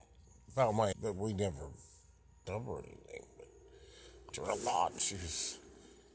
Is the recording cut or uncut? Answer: cut